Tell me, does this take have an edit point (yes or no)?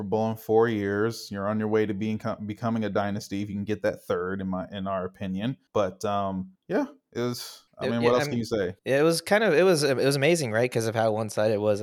yes